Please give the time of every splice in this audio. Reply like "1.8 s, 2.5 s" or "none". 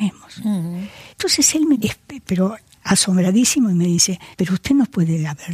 1.1 s, 1.7 s, 4.3 s